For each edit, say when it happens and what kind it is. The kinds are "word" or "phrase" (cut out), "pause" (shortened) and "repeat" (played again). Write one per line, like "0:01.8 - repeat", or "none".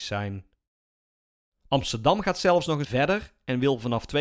0:02.8 - word